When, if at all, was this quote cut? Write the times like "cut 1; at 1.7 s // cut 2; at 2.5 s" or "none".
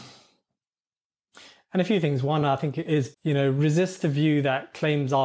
none